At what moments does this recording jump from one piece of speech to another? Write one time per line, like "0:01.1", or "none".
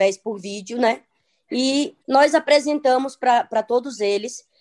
0:02.0